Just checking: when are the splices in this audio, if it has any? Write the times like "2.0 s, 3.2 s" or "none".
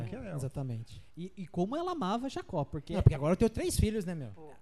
none